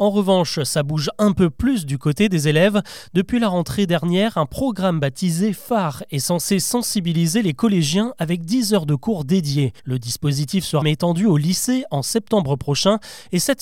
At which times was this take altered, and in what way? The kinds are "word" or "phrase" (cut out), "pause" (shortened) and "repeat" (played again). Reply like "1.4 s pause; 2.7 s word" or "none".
9.8 s pause; 10.8 s word

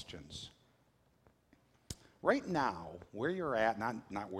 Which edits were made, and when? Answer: none

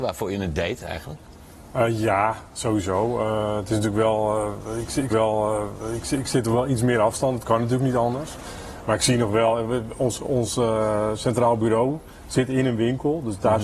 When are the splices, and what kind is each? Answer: 5.1 s repeat

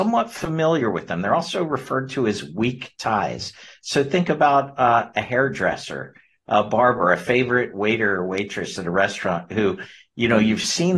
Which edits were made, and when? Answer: none

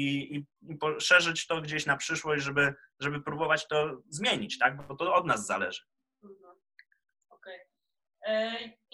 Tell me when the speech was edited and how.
none

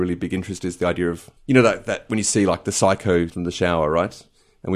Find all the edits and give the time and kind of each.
1.4 s pause; 3.3 s word

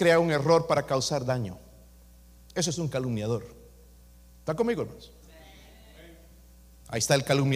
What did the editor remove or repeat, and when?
none

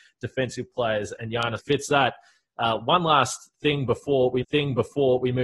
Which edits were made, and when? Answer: 1.6 s word; 4.4 s repeat

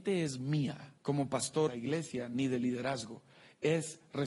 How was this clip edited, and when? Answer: 1.0 s pause; 1.7 s phrase

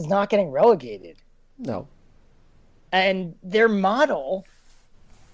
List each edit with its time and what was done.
none

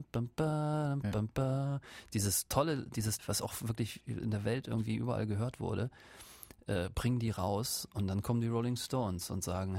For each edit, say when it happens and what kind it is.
3.2 s phrase

